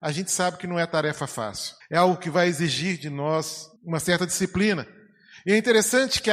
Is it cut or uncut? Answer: cut